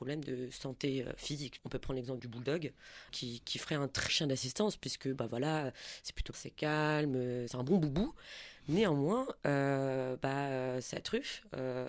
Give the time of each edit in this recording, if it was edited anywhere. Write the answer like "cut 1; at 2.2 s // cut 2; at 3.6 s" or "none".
cut 1; at 1.6 s // cut 2; at 2.2 s // cut 3; at 3.1 s // cut 4; at 4.1 s // cut 5; at 6.3 s // cut 6; at 7.5 s